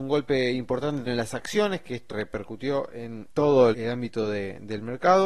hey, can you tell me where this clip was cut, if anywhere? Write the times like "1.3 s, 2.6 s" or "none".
1.0 s, 2.1 s, 3.3 s, 3.7 s